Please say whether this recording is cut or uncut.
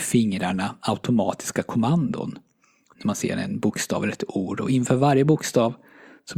uncut